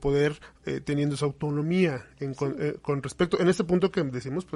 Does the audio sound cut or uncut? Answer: uncut